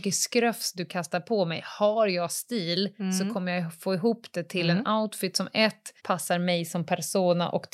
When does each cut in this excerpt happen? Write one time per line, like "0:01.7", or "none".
0:06.0